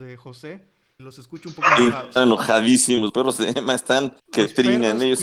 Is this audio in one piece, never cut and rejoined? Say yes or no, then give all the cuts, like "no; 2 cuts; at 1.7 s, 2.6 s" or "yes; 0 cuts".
no; 4 cuts; at 1.0 s, 2.2 s, 3.1 s, 4.2 s